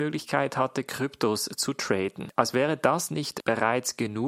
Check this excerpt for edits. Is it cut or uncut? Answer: uncut